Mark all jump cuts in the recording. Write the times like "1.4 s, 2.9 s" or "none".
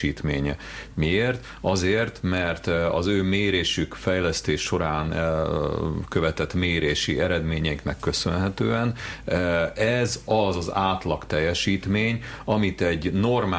none